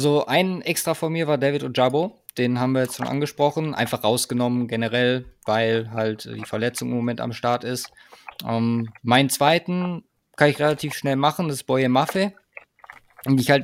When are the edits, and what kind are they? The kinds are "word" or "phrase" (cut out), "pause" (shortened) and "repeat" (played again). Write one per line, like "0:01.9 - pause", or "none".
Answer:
none